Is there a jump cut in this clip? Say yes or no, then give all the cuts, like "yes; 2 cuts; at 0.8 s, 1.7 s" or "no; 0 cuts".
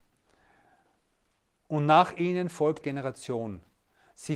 yes; 1 cut; at 2.8 s